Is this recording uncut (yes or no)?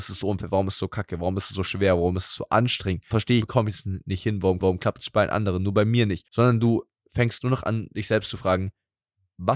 no